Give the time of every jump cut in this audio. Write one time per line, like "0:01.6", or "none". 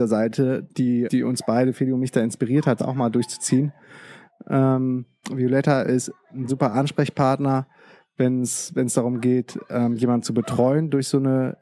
0:01.1
0:02.8
0:06.5